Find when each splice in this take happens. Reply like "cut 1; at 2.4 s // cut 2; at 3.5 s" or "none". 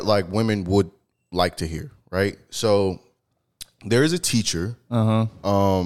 none